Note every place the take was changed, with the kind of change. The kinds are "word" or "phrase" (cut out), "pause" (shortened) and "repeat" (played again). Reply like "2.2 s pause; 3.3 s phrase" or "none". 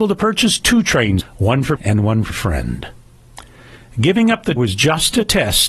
1.2 s word; 1.8 s word; 2.3 s word; 4.6 s word